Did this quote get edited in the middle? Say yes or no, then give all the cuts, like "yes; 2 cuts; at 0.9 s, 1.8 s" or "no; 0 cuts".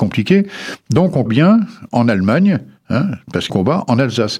yes; 2 cuts; at 1.3 s, 3.5 s